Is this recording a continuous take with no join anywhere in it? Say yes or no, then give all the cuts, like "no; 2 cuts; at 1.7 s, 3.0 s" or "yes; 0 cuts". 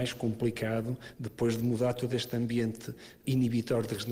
yes; 0 cuts